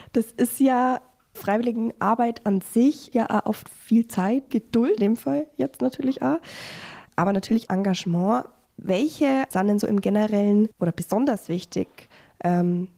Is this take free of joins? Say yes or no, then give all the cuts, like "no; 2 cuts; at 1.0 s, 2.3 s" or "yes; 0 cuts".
no; 8 cuts; at 1.3 s, 3.1 s, 4.5 s, 5.0 s, 7.1 s, 7.7 s, 9.5 s, 10.7 s